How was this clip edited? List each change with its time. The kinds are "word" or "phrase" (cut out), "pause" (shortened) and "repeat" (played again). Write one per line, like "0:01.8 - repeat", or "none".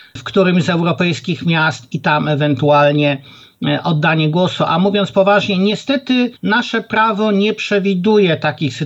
0:06.4 - pause